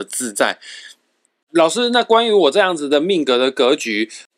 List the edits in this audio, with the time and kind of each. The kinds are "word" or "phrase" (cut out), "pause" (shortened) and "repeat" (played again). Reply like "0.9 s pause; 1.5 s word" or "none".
none